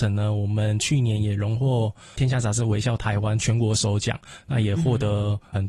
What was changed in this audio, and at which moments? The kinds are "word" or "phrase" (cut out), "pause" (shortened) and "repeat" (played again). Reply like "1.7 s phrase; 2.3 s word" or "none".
none